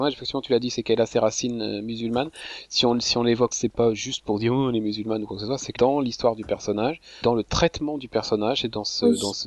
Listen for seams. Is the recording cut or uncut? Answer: cut